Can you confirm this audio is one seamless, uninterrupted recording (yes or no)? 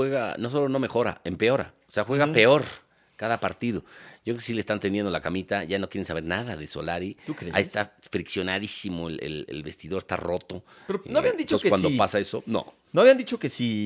yes